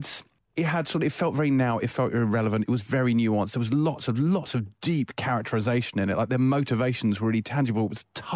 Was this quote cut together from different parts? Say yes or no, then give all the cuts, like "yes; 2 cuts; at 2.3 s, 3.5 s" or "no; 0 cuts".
no; 0 cuts